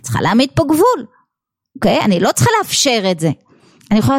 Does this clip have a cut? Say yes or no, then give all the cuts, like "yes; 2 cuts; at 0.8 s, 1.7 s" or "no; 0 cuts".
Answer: no; 0 cuts